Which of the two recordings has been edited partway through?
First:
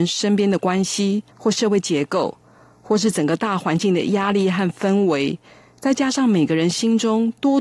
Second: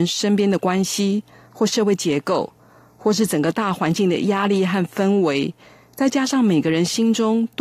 first; 1 cut; at 1.3 s

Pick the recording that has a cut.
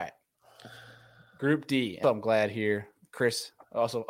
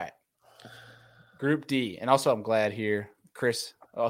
first; 1 cut; at 2.0 s

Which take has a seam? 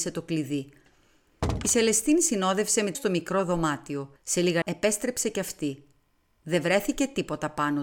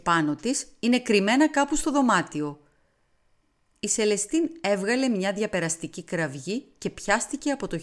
first; 3 cuts; at 2.9 s, 4.2 s, 4.6 s

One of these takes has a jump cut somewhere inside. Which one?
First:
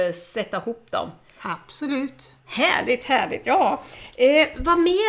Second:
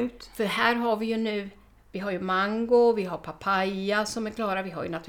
first; 1 cut; at 2.4 s

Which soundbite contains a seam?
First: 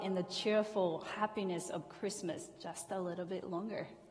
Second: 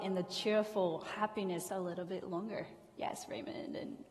second; 1 cut; at 1.7 s

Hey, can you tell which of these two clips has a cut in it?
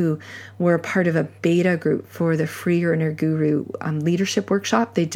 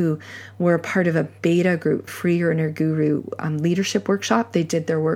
second; 1 cut; at 2.1 s

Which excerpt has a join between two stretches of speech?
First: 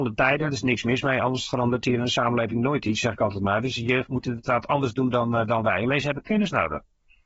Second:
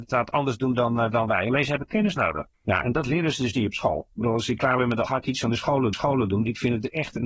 second; 3 cuts; at 2.5 s, 5.0 s, 5.9 s

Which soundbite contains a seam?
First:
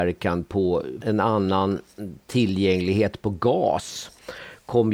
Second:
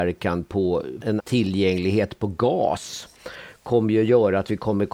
second; 1 cut; at 1.2 s

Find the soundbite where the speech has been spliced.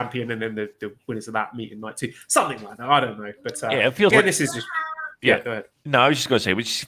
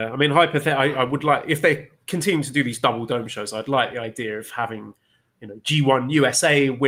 first; 1 cut; at 4.1 s

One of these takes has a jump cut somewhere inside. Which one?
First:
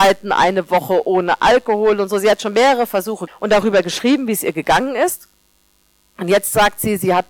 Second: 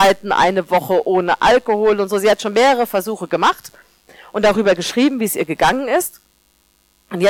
first; 1 cut; at 3.3 s

